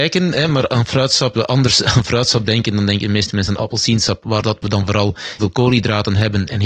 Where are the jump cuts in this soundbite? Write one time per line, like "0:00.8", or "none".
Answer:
0:01.3
0:01.8
0:03.6
0:05.4